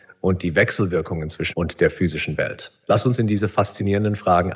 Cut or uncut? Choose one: cut